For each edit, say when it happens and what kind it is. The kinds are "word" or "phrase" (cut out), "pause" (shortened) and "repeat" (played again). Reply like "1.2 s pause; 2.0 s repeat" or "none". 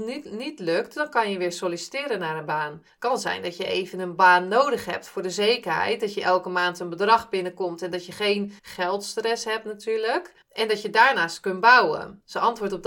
8.6 s pause; 10.4 s pause